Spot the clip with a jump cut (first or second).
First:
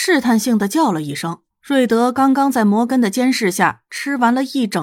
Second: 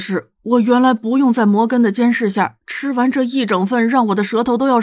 first